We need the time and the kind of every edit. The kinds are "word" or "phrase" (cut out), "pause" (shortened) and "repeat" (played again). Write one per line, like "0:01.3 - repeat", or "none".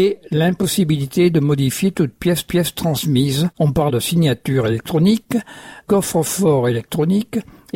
0:02.5 - repeat
0:03.9 - word
0:05.8 - word